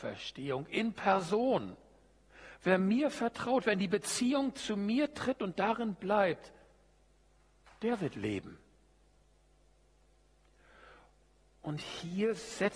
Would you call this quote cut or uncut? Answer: uncut